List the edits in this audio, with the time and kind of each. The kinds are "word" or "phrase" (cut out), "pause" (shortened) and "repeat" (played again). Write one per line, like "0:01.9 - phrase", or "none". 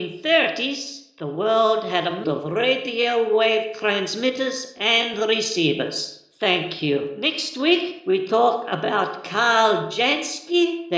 0:02.2 - word